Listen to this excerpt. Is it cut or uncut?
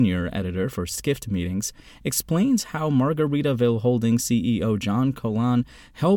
uncut